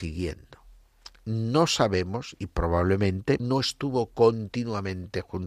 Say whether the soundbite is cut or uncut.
cut